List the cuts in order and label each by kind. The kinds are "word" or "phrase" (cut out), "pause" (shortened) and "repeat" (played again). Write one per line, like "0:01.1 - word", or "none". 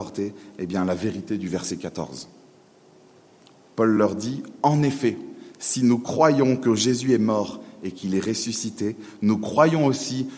none